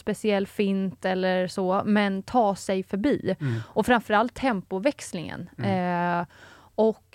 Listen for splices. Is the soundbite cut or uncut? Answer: uncut